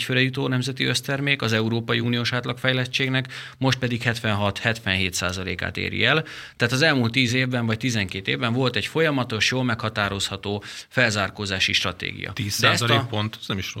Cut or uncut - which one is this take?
uncut